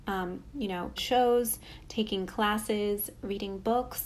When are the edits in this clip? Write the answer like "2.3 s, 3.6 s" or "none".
1.0 s